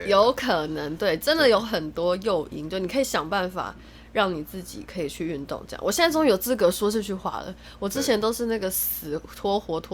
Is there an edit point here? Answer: no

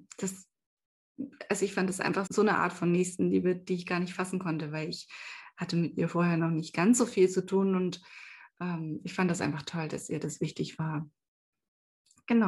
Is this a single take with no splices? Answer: no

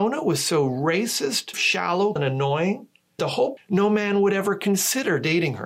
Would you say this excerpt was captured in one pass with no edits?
no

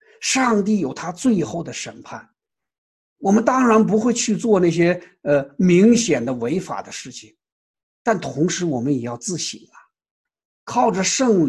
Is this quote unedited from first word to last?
yes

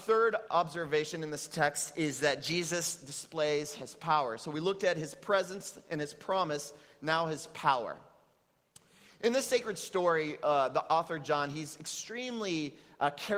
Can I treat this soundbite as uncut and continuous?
yes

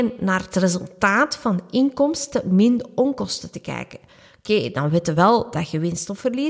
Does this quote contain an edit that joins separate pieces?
no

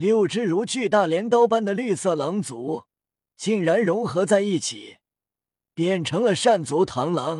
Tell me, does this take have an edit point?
no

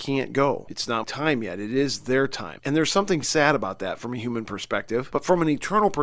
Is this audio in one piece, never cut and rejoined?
no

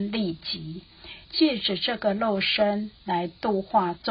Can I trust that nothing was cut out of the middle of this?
no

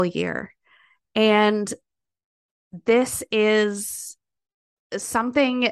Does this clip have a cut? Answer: no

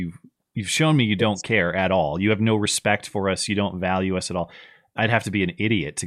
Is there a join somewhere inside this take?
no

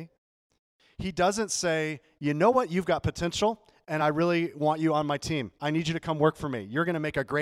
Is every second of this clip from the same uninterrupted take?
yes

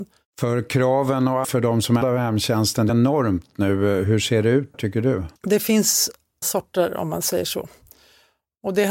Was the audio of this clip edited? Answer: yes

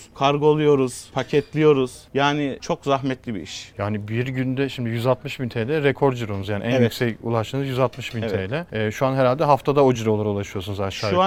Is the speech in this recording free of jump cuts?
yes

